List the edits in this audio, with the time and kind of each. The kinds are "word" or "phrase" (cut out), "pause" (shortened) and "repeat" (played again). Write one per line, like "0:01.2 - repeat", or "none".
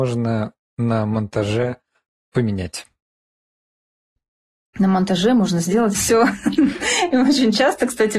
0:05.9 - word